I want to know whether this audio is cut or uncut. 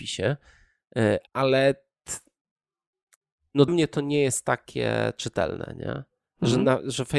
cut